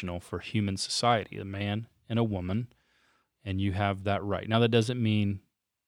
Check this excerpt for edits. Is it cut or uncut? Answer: uncut